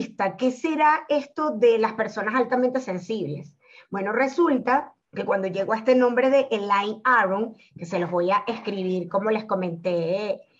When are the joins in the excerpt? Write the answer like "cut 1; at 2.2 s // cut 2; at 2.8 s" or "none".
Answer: cut 1; at 5.0 s